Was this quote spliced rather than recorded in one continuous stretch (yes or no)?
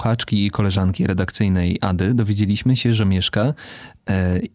no